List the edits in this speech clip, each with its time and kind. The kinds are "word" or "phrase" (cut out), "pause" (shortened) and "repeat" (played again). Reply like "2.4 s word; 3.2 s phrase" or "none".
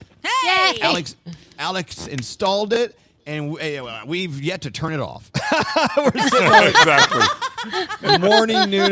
none

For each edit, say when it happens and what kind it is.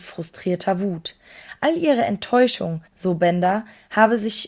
2.9 s pause

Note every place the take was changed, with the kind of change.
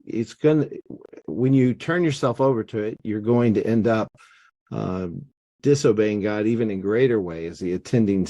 none

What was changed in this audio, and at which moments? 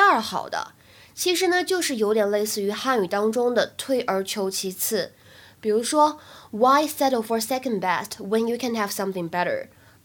none

